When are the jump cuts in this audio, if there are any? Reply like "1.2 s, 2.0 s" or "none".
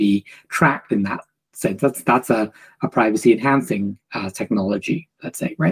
none